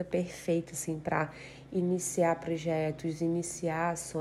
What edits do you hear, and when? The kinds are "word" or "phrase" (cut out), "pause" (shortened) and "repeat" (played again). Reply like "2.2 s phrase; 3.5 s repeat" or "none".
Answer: none

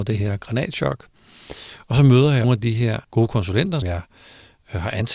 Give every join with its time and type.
2.4 s word; 3.0 s pause; 3.8 s word

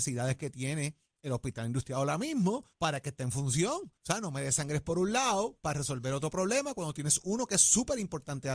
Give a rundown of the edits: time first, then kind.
2.7 s pause; 4.0 s pause

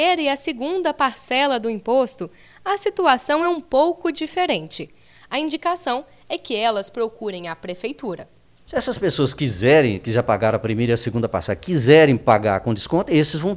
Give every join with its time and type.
none

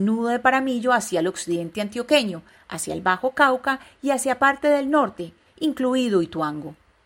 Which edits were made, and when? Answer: none

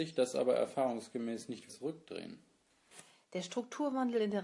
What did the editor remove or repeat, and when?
1.7 s word

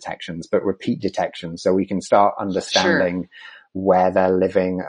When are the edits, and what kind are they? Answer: none

